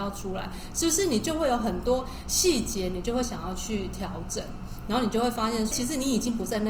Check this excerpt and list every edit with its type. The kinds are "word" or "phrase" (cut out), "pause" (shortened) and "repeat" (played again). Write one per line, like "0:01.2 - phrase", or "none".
0:05.7 - word